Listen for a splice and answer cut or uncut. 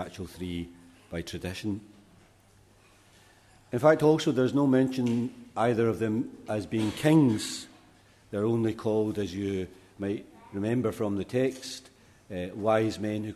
uncut